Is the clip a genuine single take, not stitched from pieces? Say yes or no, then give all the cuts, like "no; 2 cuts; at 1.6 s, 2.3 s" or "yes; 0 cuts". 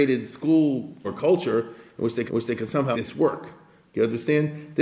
no; 3 cuts; at 1.0 s, 2.3 s, 2.9 s